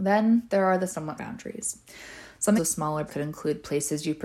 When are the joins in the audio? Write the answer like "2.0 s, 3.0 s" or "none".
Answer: 1.2 s, 2.6 s, 3.1 s